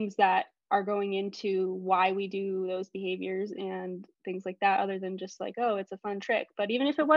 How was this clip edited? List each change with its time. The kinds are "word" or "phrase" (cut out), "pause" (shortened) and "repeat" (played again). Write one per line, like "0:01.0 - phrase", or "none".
none